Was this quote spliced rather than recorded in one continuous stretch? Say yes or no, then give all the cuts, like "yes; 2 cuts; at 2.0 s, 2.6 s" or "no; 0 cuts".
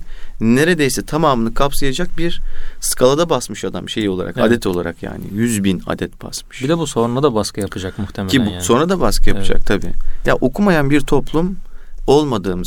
no; 0 cuts